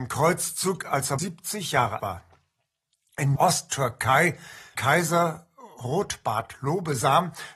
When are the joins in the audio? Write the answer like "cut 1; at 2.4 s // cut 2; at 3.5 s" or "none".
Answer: cut 1; at 1.2 s // cut 2; at 2.0 s // cut 3; at 3.4 s // cut 4; at 4.8 s

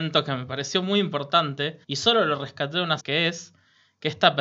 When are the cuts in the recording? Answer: cut 1; at 1.8 s // cut 2; at 3.0 s

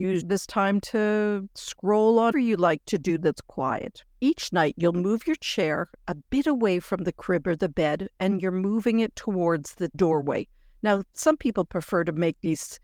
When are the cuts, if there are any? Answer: cut 1; at 2.3 s // cut 2; at 4.1 s

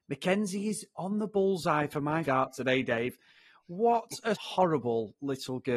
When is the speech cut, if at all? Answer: cut 1; at 2.3 s // cut 2; at 4.4 s

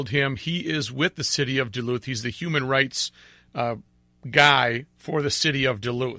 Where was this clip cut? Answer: none

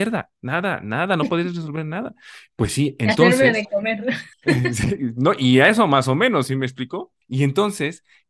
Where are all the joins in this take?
cut 1; at 4.3 s // cut 2; at 7.2 s

